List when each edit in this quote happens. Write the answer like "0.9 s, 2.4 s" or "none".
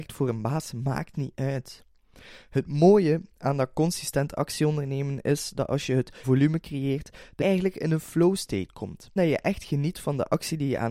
6.2 s, 7.4 s, 9.2 s